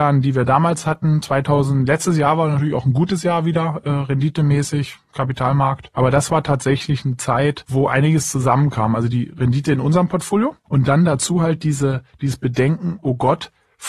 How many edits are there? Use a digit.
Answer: 1